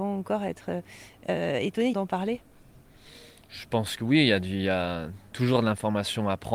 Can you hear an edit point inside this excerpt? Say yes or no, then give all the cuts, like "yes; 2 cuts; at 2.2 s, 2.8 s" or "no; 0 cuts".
yes; 1 cut; at 1.9 s